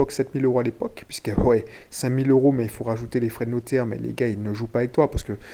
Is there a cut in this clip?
no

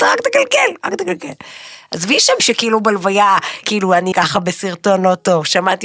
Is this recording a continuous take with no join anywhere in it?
no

